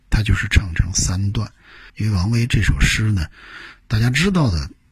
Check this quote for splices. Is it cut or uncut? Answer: cut